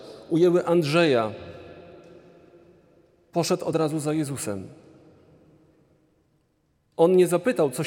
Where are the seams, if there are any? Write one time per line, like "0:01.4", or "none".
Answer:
none